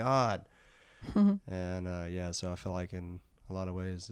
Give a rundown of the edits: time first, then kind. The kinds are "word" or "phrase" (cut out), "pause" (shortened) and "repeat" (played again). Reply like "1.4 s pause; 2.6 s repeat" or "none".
none